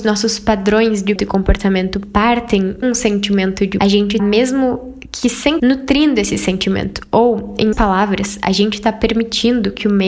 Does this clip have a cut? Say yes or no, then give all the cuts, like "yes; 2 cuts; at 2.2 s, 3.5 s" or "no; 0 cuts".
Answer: yes; 6 cuts; at 1.2 s, 2.8 s, 3.8 s, 4.2 s, 5.6 s, 7.7 s